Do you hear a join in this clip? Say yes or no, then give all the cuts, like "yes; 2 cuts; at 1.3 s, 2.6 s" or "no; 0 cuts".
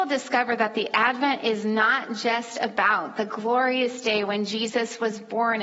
no; 0 cuts